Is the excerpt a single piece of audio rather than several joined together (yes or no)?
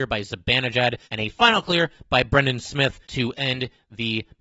no